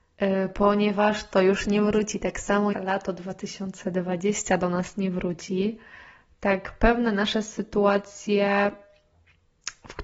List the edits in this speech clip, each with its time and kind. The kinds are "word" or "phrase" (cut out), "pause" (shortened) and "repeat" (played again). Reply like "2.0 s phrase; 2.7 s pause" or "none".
2.7 s word